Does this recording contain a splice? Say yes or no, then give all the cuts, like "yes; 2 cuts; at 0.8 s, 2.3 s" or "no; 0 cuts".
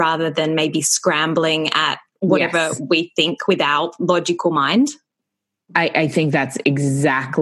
no; 0 cuts